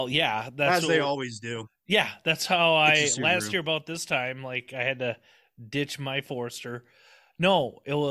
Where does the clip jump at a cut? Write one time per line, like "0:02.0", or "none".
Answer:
none